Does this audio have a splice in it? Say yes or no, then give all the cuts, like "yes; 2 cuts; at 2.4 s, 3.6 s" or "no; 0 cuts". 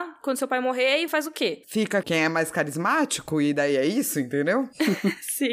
yes; 1 cut; at 1.1 s